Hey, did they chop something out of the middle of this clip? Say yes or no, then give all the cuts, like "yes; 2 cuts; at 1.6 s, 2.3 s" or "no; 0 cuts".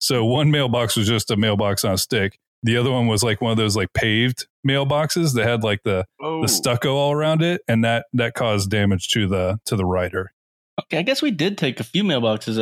no; 0 cuts